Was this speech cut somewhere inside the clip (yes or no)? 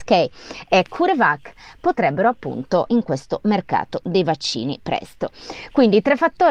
yes